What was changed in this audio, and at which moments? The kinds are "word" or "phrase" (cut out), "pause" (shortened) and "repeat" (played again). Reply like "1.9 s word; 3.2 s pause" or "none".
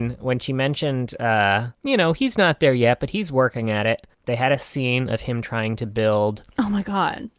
1.7 s pause; 4.1 s pause